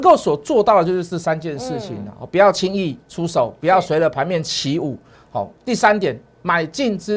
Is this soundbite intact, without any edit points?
no; 2 cuts; at 5.1 s, 5.6 s

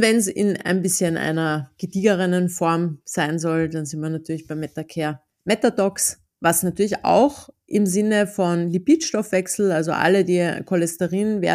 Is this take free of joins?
no; 1 cut; at 5.3 s

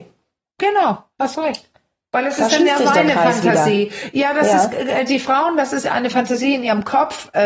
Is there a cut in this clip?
no; 0 cuts

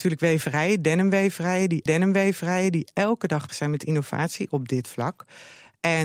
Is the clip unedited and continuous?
no; 2 cuts; at 1.9 s, 3.5 s

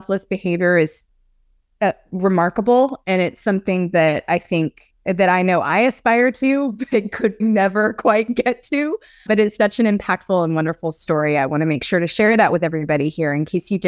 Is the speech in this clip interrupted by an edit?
yes; 3 cuts; at 7.4 s, 9.3 s, 9.6 s

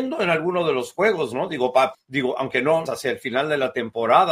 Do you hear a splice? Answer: yes; 2 cuts; at 1.9 s, 2.9 s

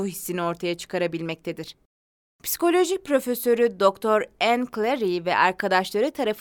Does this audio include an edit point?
no; 0 cuts

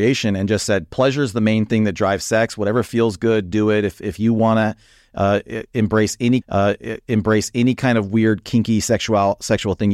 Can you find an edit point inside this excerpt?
yes; 1 cut; at 6.4 s

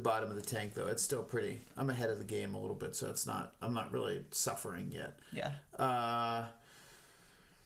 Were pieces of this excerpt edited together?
no; 0 cuts

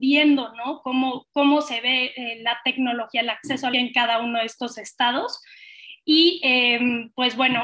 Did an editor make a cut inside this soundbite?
yes; 1 cut; at 3.7 s

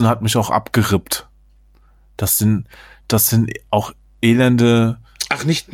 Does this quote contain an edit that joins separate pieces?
no; 0 cuts

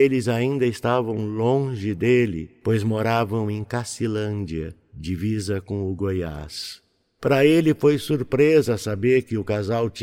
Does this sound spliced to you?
no; 0 cuts

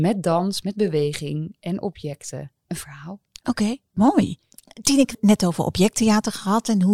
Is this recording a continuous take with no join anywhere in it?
no; 4 cuts; at 2.6 s, 3.3 s, 3.9 s, 5.1 s

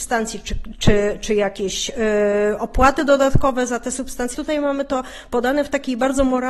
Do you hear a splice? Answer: yes; 1 cut; at 4.3 s

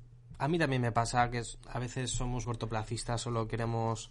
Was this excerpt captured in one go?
no; 1 cut; at 2.4 s

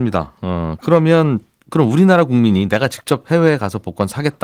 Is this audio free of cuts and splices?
yes; 0 cuts

